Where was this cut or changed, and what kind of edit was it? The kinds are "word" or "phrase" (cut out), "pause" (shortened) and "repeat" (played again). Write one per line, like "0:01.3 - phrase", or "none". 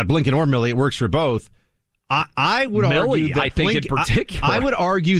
none